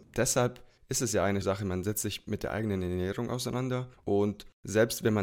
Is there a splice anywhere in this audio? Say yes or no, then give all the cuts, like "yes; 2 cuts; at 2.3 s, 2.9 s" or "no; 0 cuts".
yes; 1 cut; at 1.4 s